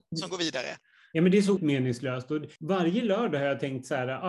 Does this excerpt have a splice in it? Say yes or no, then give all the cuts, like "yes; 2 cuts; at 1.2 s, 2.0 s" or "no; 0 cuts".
yes; 2 cuts; at 1.6 s, 2.6 s